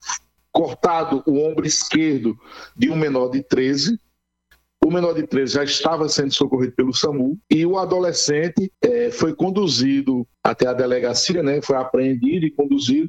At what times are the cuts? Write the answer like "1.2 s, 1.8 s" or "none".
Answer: 7.4 s, 8.7 s, 10.3 s